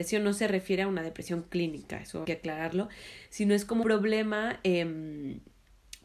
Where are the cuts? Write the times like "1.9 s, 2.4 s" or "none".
2.2 s, 3.8 s